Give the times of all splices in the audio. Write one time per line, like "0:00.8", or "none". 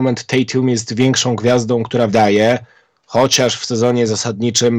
0:02.1